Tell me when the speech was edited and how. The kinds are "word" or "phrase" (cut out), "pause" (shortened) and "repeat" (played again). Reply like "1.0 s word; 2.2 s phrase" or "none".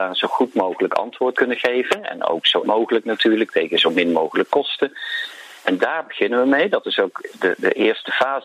1.3 s word; 2.6 s word